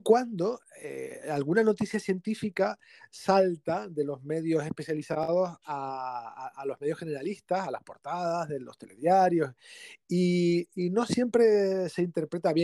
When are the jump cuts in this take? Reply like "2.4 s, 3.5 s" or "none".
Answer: none